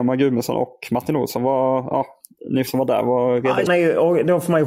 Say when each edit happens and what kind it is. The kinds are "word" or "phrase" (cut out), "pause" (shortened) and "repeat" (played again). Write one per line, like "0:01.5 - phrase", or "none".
0:02.7 - word
0:03.7 - word